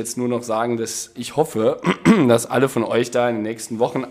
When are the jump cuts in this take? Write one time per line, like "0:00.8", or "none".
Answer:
none